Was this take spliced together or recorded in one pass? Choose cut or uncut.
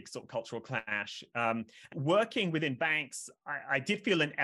cut